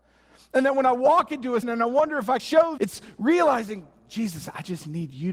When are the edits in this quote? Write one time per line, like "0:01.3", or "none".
0:01.6
0:02.4
0:02.8

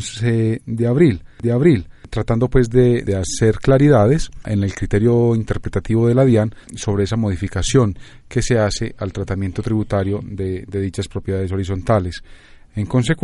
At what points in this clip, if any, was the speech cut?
0:01.4
0:03.1
0:06.6

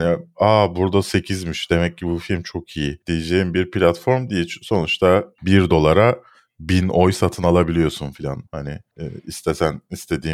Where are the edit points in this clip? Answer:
0:08.5

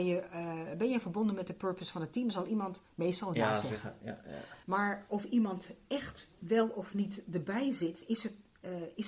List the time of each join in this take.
0:04.6

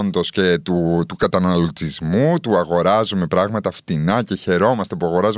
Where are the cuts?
none

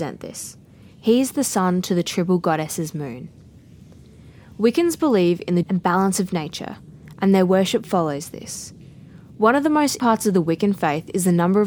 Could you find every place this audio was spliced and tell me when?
0:05.6
0:10.0

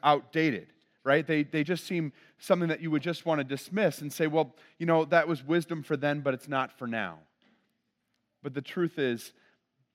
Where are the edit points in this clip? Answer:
none

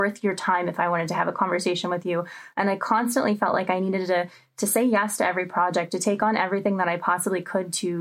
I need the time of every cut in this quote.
none

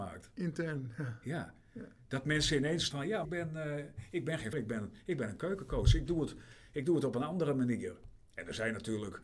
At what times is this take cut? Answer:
0:02.9
0:03.2
0:04.5

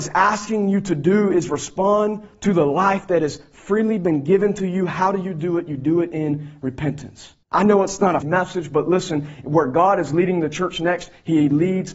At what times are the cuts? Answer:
0:07.4
0:08.2

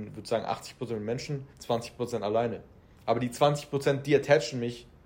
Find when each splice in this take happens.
0:01.5

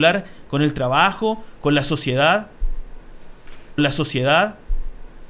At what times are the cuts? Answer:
0:03.8

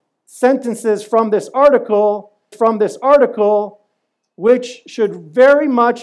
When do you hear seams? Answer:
0:02.5

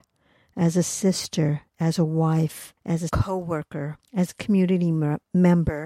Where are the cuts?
0:02.8
0:03.1
0:04.0

